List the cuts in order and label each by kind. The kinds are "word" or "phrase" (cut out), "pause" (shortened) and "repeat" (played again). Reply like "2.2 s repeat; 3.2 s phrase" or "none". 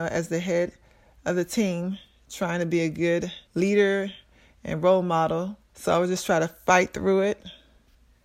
3.5 s pause; 5.6 s pause